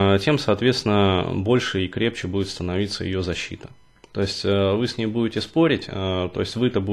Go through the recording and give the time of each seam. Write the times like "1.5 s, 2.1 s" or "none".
none